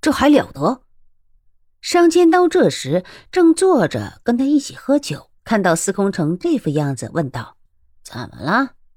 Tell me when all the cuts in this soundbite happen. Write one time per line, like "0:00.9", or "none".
0:05.4
0:07.7